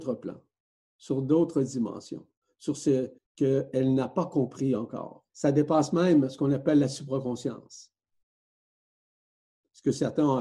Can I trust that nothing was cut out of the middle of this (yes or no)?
no